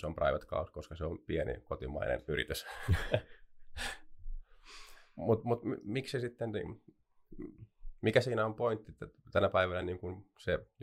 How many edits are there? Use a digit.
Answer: 0